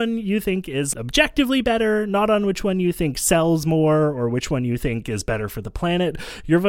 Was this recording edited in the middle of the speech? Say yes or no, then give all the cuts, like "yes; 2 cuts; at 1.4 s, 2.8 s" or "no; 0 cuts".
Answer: yes; 1 cut; at 0.9 s